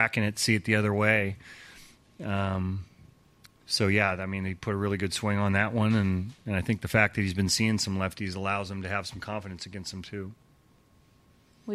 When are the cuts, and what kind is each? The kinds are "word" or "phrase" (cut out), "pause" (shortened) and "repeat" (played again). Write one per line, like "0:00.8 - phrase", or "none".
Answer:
none